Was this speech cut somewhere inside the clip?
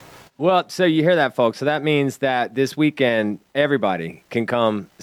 no; 0 cuts

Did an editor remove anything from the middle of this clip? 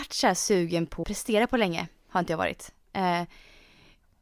yes; 1 cut; at 1.0 s

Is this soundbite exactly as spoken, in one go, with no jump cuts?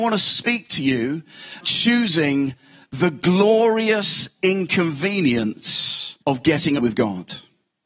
no; 3 cuts; at 1.6 s, 6.2 s, 6.8 s

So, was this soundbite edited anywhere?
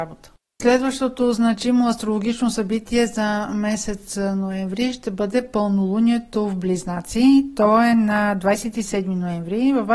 no; 0 cuts

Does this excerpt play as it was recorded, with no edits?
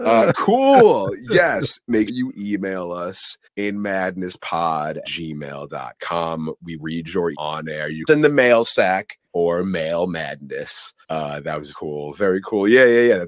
no; 9 cuts; at 2.1 s, 3.4 s, 5.0 s, 6.8 s, 7.3 s, 8.1 s, 9.2 s, 11.0 s, 11.7 s

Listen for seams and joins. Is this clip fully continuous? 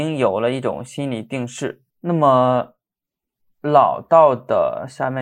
no; 1 cut; at 1.9 s

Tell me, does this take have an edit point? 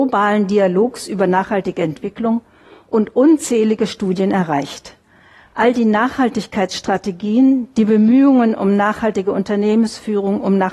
no; 0 cuts

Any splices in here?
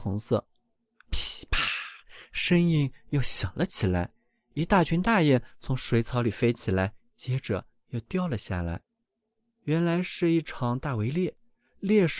no; 0 cuts

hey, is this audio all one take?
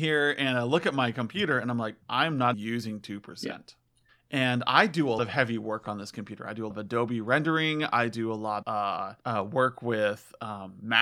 no; 7 cuts; at 2.0 s, 2.5 s, 4.1 s, 5.2 s, 6.7 s, 8.6 s, 9.2 s

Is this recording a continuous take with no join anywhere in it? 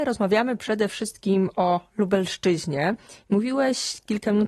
yes; 0 cuts

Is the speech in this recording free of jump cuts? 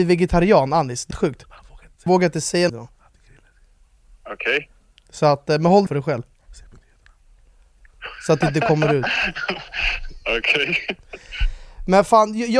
no; 4 cuts; at 1.1 s, 2.1 s, 2.7 s, 5.9 s

